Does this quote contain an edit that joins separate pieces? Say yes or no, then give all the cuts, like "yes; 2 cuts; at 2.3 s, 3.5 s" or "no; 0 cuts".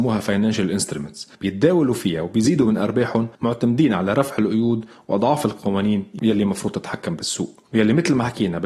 yes; 2 cuts; at 1.3 s, 3.3 s